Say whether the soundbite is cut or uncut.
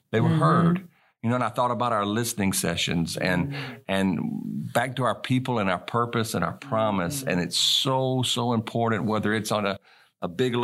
uncut